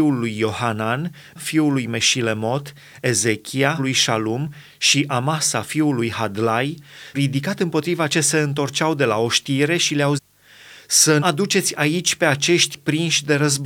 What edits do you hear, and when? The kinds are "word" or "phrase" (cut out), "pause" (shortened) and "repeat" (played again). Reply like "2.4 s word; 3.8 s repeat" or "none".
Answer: 1.4 s word; 3.8 s word; 7.1 s word; 8.1 s word; 10.2 s word; 11.2 s word